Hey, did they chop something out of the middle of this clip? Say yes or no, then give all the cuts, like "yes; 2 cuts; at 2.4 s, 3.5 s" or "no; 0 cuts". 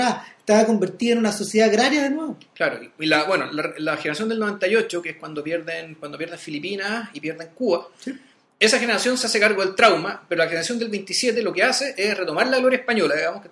no; 0 cuts